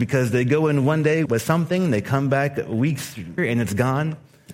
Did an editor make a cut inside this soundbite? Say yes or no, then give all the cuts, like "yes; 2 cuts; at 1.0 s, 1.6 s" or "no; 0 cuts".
yes; 2 cuts; at 1.3 s, 3.4 s